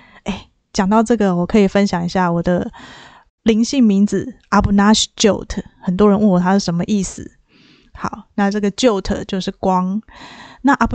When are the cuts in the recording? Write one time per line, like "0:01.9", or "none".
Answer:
none